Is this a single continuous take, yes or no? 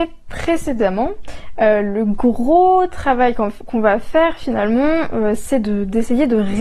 yes